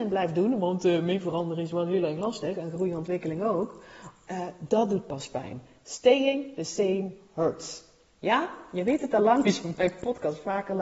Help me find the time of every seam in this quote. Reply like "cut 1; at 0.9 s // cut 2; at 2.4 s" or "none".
none